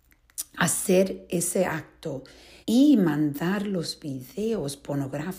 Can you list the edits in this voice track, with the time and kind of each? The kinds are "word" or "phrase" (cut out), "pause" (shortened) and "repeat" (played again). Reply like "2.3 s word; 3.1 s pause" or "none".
2.6 s pause